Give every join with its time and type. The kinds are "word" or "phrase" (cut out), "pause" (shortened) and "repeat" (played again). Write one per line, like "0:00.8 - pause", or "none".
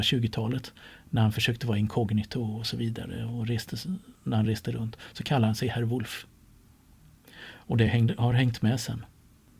none